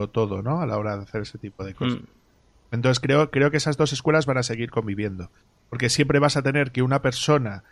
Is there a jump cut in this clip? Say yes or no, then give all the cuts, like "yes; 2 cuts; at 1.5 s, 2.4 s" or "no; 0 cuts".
no; 0 cuts